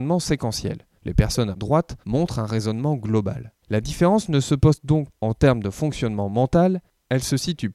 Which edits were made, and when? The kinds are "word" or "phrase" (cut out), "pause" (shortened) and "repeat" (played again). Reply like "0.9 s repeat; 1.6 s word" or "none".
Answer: 1.0 s pause; 1.5 s phrase; 2.0 s pause; 3.6 s pause; 5.1 s word